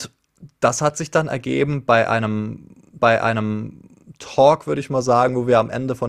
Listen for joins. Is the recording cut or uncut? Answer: cut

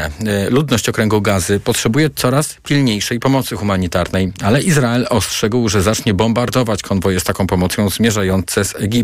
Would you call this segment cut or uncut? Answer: uncut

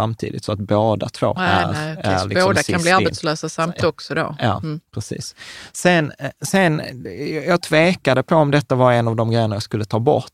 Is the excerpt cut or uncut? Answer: cut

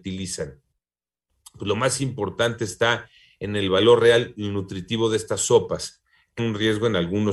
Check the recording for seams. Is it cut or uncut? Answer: cut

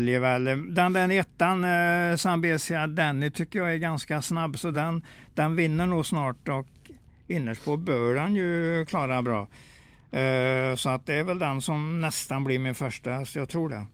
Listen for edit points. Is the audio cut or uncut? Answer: uncut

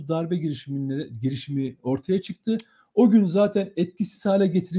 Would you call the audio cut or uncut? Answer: uncut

